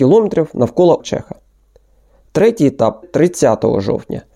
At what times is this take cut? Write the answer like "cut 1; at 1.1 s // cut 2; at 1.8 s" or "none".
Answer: cut 1; at 1.0 s // cut 2; at 3.0 s